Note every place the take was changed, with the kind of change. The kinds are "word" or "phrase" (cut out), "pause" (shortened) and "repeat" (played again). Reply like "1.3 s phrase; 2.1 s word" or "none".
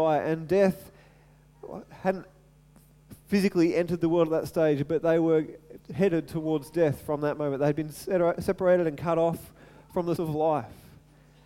10.2 s word